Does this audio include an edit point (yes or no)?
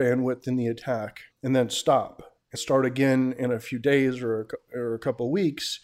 yes